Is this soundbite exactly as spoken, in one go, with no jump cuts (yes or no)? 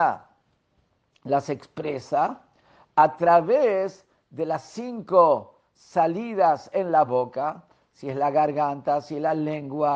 yes